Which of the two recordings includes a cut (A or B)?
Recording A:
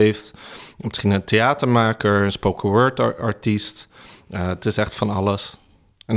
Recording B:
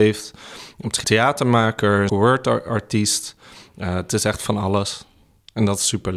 B